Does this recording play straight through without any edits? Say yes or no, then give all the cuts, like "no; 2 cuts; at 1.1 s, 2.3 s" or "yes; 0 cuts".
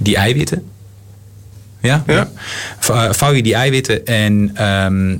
no; 1 cut; at 2.1 s